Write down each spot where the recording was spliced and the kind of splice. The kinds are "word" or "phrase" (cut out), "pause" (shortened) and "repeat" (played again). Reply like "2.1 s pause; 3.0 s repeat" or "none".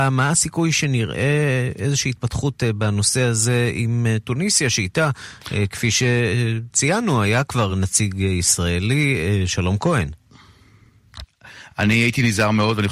none